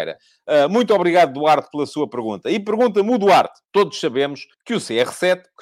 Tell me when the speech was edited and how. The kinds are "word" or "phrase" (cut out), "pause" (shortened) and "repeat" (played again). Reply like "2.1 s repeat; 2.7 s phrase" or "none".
3.6 s pause; 4.5 s pause